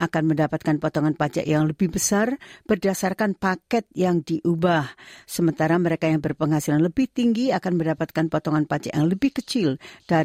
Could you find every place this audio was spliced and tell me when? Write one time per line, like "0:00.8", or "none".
none